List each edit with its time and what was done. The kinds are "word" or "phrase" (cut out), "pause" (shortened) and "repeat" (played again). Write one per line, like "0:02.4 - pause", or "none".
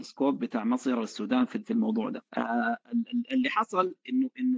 0:02.3 - pause